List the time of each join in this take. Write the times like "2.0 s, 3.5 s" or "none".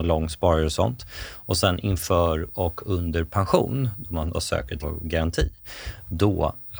4.3 s, 4.8 s

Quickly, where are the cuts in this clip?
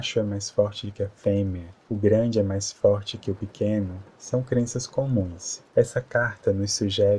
1.8 s, 5.7 s

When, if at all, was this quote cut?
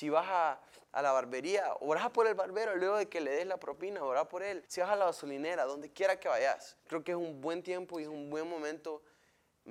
4.7 s, 6.8 s

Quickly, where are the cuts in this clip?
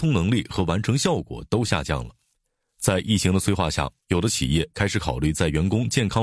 none

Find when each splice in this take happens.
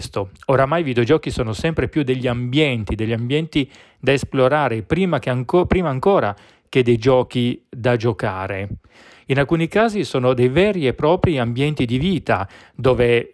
none

